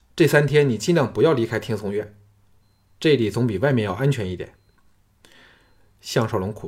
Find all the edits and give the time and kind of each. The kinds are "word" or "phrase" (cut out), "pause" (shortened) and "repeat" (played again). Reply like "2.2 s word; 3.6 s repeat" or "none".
none

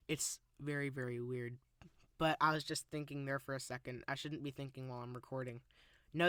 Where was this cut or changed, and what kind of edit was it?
none

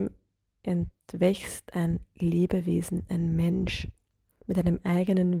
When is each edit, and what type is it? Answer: none

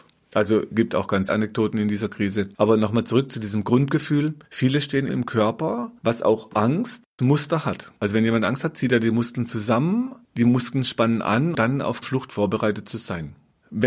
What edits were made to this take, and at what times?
1.3 s word; 5.1 s phrase; 7.2 s word; 8.0 s pause; 11.5 s word; 12.0 s phrase

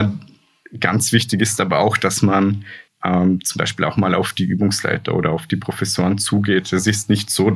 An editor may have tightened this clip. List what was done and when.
2.9 s pause

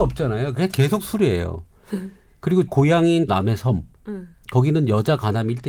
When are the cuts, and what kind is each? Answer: 2.7 s word; 3.3 s word

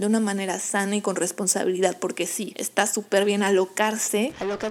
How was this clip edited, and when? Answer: none

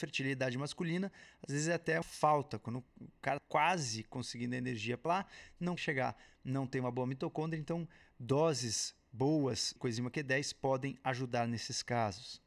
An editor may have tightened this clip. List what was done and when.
2.0 s word; 3.4 s word; 5.1 s word; 5.8 s word; 6.4 s word; 9.8 s word

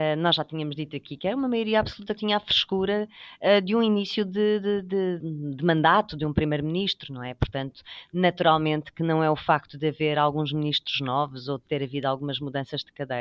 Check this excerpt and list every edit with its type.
2.2 s word; 5.2 s word

